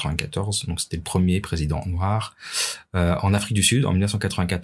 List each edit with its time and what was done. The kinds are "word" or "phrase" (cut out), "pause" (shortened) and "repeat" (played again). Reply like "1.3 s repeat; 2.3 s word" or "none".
none